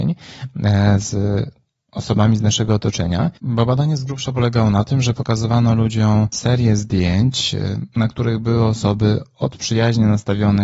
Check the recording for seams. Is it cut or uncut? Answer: uncut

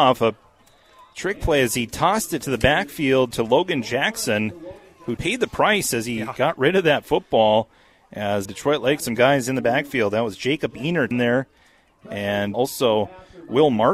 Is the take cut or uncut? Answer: cut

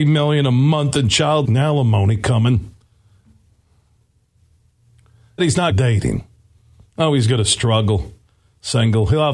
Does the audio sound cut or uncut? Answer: cut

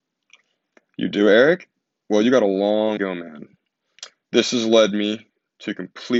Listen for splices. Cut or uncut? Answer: cut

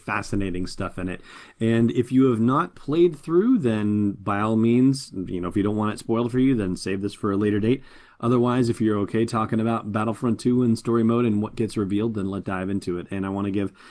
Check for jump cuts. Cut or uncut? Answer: cut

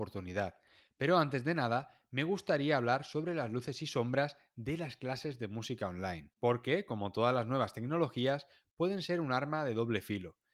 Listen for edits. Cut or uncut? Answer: cut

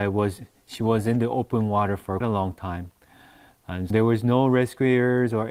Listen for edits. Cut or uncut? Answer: cut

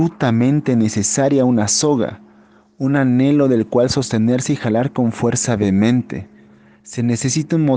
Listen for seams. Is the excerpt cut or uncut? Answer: uncut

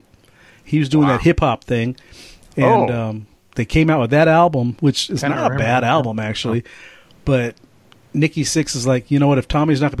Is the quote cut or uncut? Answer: uncut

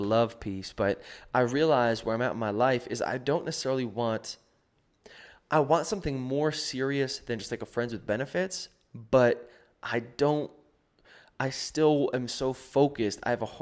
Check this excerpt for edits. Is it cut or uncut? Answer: uncut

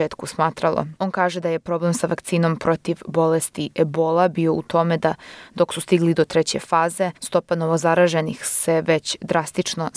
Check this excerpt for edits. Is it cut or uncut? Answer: cut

